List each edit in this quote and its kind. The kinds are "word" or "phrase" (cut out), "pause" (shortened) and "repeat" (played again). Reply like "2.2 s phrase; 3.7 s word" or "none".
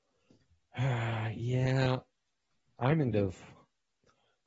3.1 s word